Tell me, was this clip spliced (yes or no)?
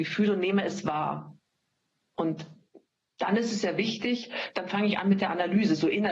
no